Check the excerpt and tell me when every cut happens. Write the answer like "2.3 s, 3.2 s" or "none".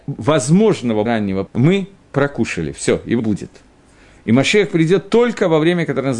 1.1 s, 1.5 s, 3.2 s